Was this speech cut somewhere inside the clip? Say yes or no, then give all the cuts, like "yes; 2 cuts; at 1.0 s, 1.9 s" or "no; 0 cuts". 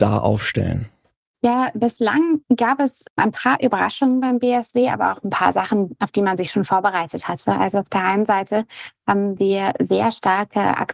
no; 0 cuts